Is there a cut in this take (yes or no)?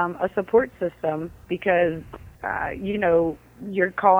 yes